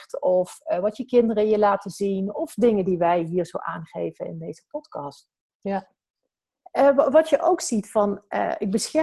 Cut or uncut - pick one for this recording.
uncut